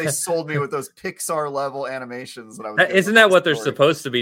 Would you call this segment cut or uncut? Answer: uncut